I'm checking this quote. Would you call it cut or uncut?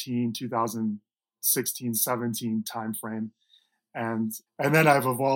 cut